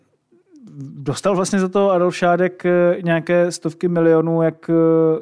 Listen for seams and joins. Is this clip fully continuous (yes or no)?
yes